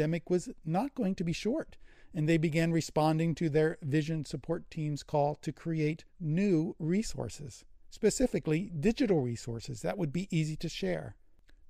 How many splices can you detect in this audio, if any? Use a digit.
2